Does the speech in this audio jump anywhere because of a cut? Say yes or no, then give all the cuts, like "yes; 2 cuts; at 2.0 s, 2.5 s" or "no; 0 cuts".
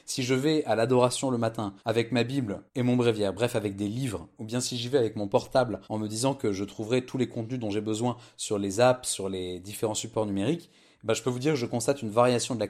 yes; 3 cuts; at 1.8 s, 2.7 s, 5.8 s